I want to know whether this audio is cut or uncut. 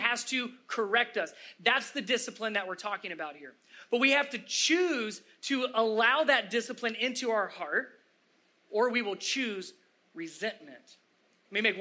uncut